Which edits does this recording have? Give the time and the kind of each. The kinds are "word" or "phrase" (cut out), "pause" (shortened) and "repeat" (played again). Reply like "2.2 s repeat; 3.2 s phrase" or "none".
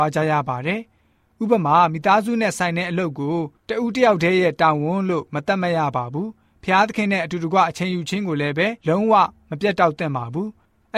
8.8 s pause